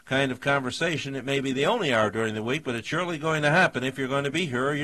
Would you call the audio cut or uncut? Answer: uncut